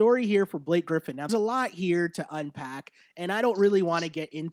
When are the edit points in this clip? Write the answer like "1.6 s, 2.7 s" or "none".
1.3 s